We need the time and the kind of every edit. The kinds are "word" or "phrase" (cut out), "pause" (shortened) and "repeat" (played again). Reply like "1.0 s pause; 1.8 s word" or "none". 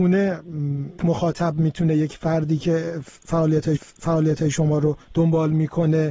1.0 s word; 3.8 s repeat; 5.0 s pause